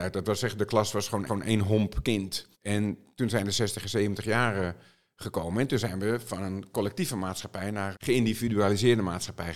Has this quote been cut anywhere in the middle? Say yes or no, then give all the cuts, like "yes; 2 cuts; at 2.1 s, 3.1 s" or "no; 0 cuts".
yes; 3 cuts; at 1.3 s, 2.5 s, 7.9 s